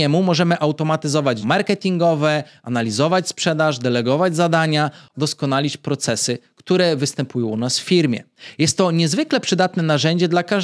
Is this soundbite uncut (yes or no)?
no